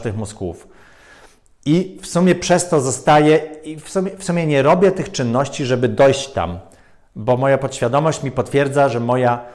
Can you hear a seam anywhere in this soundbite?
no; 0 cuts

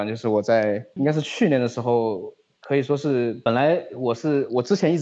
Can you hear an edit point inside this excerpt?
yes; 1 cut; at 1.0 s

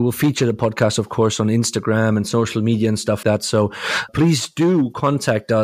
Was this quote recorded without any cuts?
no; 2 cuts; at 3.2 s, 4.1 s

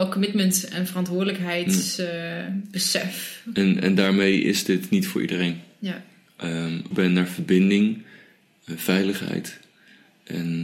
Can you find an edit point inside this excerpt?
yes; 1 cut; at 6.9 s

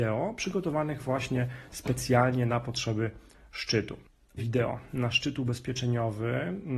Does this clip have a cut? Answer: yes; 1 cut; at 4.4 s

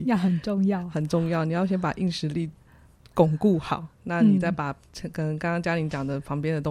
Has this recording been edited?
yes; 1 cut; at 3.9 s

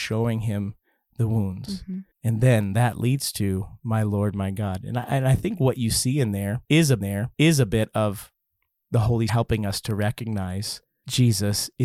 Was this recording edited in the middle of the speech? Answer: yes; 3 cuts; at 2.1 s, 7.0 s, 9.3 s

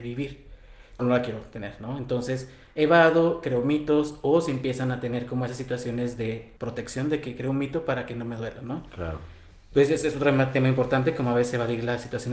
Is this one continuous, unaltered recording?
no; 2 cuts; at 1.0 s, 6.6 s

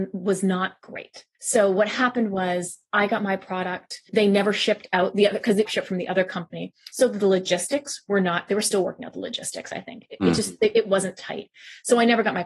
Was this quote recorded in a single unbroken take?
no; 2 cuts; at 1.3 s, 5.7 s

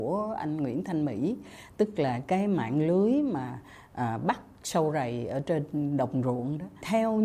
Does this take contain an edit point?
no; 0 cuts

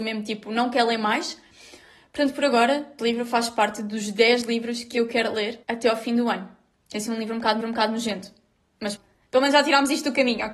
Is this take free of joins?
no; 4 cuts; at 3.0 s, 5.6 s, 7.6 s, 9.0 s

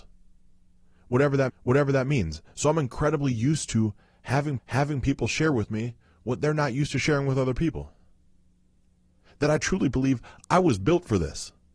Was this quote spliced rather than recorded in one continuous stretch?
yes; 2 cuts; at 1.5 s, 4.6 s

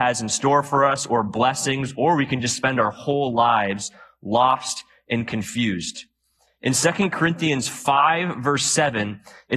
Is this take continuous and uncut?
yes; 0 cuts

